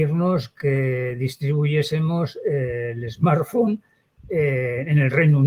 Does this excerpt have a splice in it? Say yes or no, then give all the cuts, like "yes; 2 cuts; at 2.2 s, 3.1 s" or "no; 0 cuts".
no; 0 cuts